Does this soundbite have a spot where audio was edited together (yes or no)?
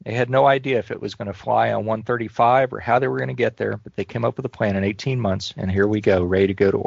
no